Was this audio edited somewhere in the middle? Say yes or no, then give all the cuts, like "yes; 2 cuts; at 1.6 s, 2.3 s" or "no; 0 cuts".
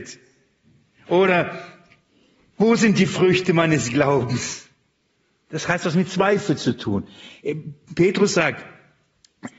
no; 0 cuts